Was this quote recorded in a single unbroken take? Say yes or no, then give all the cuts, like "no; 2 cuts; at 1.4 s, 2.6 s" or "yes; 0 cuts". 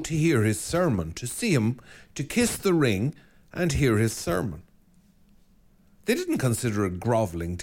yes; 0 cuts